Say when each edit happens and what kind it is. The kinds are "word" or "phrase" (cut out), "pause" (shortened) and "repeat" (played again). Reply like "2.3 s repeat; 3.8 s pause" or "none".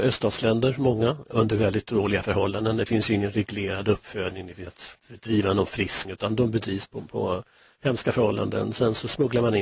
4.7 s word; 5.0 s pause; 6.0 s word